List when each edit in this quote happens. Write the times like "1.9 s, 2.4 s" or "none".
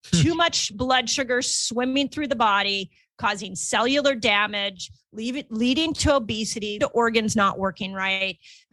6.8 s